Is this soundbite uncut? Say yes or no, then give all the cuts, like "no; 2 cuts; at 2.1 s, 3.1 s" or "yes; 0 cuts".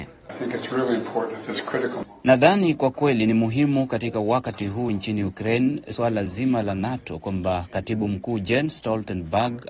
yes; 0 cuts